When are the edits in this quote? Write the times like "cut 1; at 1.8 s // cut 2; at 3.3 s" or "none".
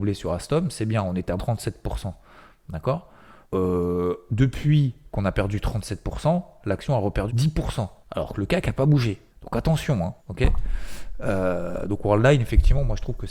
cut 1; at 1.4 s // cut 2; at 3.4 s // cut 3; at 7.3 s // cut 4; at 8.0 s // cut 5; at 9.3 s // cut 6; at 10.2 s